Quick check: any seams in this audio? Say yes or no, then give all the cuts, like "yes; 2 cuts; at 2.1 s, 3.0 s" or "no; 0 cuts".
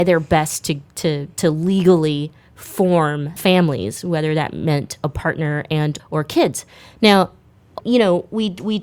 yes; 3 cuts; at 3.4 s, 6.0 s, 7.8 s